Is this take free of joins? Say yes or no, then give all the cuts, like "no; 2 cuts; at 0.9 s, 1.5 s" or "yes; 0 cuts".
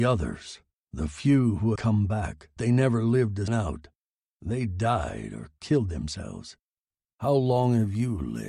no; 3 cuts; at 1.8 s, 2.6 s, 3.5 s